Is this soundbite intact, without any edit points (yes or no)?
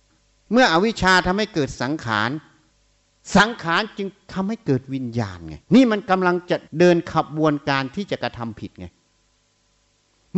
no